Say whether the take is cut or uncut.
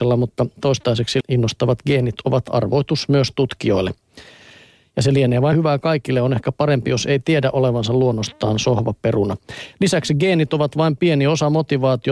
cut